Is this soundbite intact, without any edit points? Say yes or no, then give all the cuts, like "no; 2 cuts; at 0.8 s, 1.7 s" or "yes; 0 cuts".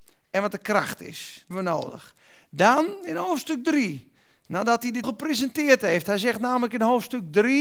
no; 2 cuts; at 1.5 s, 5.0 s